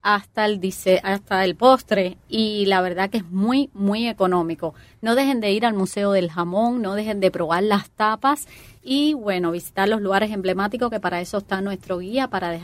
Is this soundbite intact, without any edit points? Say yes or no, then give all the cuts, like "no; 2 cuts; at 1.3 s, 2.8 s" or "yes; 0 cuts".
yes; 0 cuts